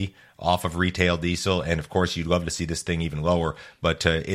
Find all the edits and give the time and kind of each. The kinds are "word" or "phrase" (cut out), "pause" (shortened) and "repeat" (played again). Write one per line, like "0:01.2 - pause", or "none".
none